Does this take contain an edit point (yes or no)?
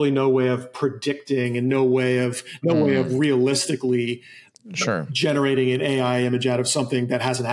no